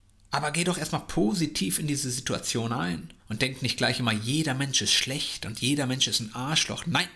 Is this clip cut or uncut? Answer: cut